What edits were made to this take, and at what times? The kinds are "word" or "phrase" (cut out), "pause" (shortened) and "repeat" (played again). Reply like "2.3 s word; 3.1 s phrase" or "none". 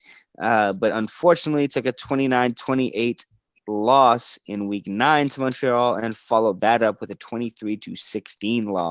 none